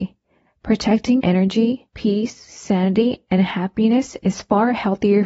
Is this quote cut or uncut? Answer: cut